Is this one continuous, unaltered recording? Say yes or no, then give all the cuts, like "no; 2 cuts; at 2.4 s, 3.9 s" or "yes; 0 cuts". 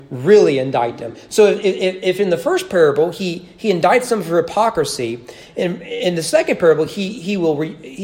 yes; 0 cuts